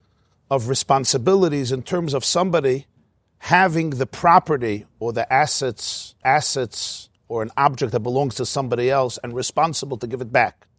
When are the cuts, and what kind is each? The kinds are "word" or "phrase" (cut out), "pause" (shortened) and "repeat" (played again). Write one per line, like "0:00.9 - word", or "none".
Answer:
0:03.1 - pause
0:06.2 - repeat